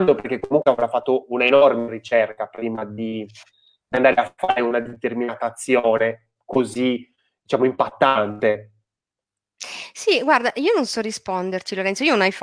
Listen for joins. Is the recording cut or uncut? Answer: uncut